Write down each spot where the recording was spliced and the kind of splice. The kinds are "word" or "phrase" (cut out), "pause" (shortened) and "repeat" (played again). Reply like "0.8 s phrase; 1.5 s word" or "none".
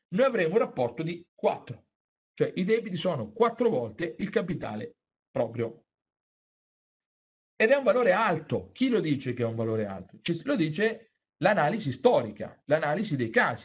none